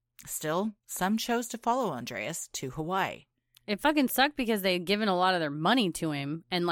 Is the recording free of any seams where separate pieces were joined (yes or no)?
yes